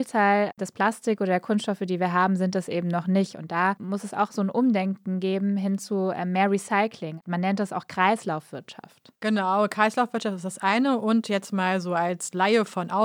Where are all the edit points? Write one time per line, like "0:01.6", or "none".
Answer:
none